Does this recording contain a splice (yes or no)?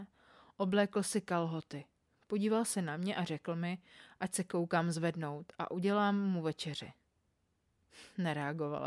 no